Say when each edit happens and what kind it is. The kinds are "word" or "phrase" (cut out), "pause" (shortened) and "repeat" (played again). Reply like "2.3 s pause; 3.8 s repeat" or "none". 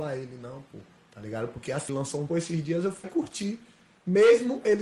1.9 s word; 2.3 s word; 3.0 s word